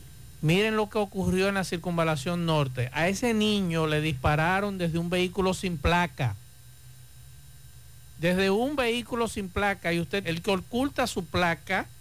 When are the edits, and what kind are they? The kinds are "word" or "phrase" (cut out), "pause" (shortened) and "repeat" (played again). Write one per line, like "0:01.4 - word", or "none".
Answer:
0:10.2 - phrase